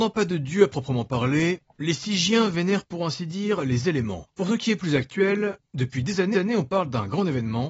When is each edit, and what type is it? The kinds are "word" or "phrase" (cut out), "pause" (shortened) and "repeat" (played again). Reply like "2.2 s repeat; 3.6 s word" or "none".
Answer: 4.3 s pause; 6.3 s repeat